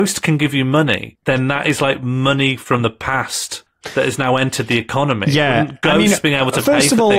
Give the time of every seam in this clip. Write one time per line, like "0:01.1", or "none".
none